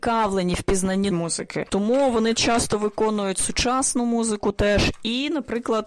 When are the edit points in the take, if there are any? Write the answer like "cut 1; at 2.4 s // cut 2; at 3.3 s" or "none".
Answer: cut 1; at 1.1 s

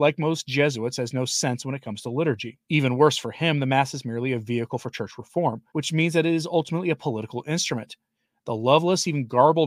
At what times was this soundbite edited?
cut 1; at 2.6 s // cut 2; at 5.7 s

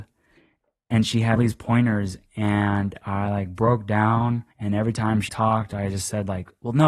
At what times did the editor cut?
cut 1; at 1.4 s // cut 2; at 4.5 s // cut 3; at 5.3 s

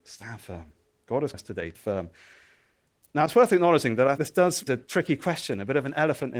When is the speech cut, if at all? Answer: cut 1; at 1.3 s // cut 2; at 1.7 s // cut 3; at 4.2 s // cut 4; at 4.7 s

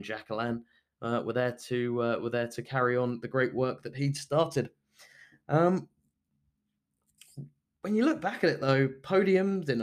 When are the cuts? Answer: none

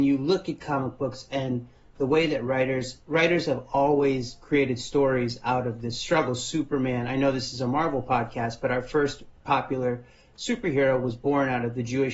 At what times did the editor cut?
none

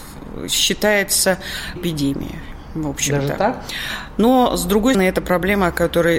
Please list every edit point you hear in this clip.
cut 1; at 1.8 s // cut 2; at 4.9 s

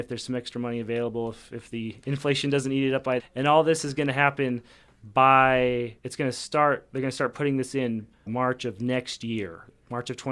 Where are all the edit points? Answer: cut 1; at 3.2 s // cut 2; at 6.0 s // cut 3; at 8.3 s

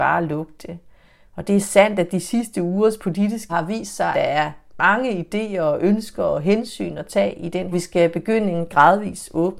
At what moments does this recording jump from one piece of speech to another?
cut 1; at 3.5 s // cut 2; at 4.1 s // cut 3; at 7.7 s

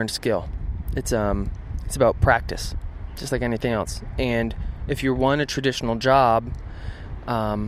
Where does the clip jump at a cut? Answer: none

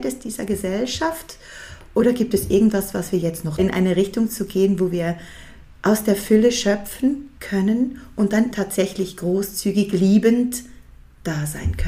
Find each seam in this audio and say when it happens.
cut 1; at 3.6 s // cut 2; at 7.4 s // cut 3; at 8.5 s

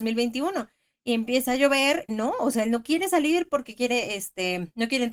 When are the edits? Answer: cut 1; at 2.1 s

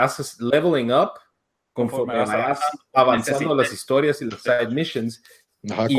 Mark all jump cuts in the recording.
none

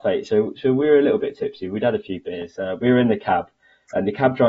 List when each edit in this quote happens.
none

